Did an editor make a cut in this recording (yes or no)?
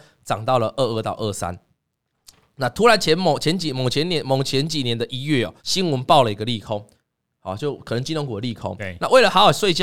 yes